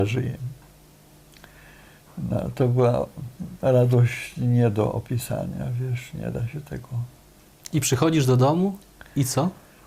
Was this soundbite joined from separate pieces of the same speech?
no; 0 cuts

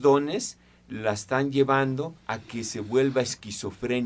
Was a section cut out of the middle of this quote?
yes; 1 cut; at 2.2 s

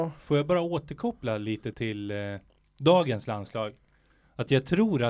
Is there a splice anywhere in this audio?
yes; 1 cut; at 1.7 s

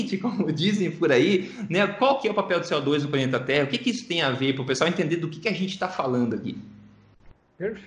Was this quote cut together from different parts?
no; 0 cuts

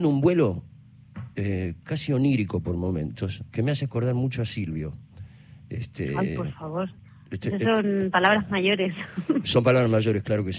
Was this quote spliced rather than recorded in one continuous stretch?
no; 0 cuts

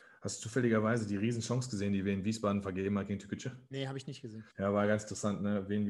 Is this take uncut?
no; 1 cut; at 4.5 s

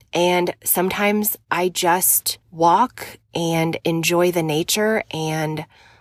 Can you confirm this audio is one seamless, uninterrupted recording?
no; 1 cut; at 2.4 s

